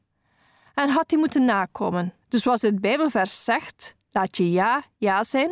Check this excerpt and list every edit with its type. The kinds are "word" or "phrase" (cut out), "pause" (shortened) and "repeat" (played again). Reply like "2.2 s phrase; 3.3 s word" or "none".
2.2 s pause